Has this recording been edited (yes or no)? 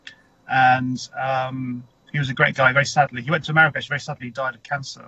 no